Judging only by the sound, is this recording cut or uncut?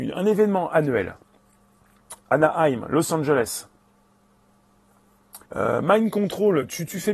cut